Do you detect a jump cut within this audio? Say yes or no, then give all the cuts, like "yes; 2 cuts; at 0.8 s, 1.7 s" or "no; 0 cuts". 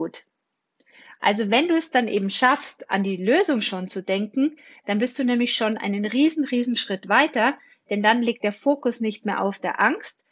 no; 0 cuts